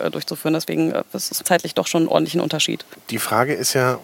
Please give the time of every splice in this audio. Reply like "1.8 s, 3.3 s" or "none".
1.4 s

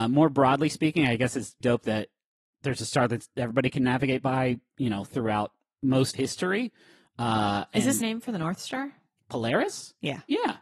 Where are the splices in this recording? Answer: 1.6 s, 6.1 s, 8.0 s

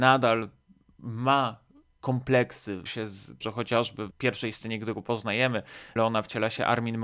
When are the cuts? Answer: 2.9 s, 3.4 s, 4.1 s, 6.0 s

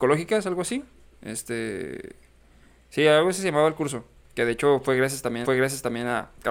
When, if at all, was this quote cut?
5.4 s

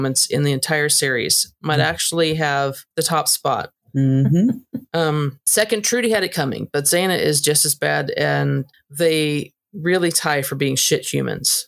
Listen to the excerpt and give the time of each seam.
2.9 s, 8.7 s

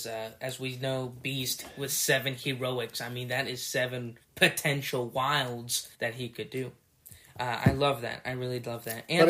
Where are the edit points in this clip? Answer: 4.2 s, 5.9 s

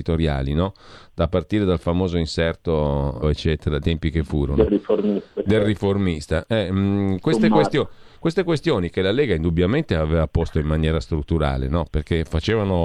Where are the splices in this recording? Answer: 3.2 s, 3.8 s

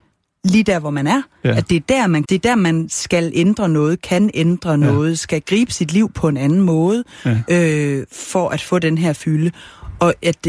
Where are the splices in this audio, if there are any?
2.2 s

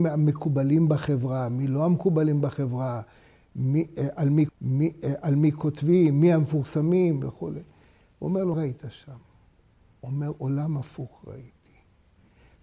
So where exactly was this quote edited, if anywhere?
4.5 s, 8.5 s

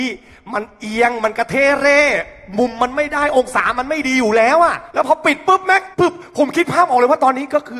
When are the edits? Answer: 4.9 s, 5.9 s

